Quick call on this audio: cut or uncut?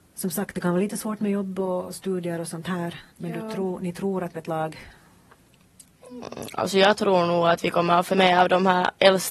cut